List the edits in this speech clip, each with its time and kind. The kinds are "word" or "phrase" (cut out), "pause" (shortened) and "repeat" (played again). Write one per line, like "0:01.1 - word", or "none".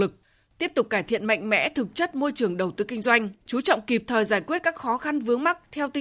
0:03.4 - pause

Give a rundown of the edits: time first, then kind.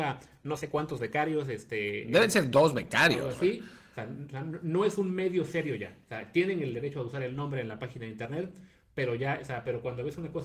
none

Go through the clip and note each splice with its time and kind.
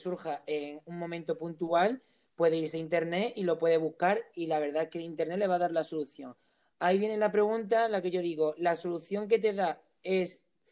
none

